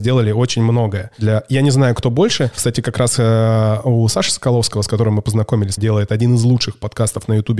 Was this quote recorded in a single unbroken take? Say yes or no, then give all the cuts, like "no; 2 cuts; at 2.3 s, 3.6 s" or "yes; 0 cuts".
no; 1 cut; at 5.8 s